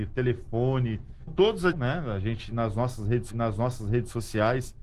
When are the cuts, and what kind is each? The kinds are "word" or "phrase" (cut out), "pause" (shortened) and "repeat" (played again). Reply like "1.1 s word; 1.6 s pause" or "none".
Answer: 1.3 s phrase; 1.7 s word; 3.3 s repeat